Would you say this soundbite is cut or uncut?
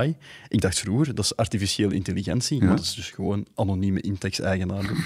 uncut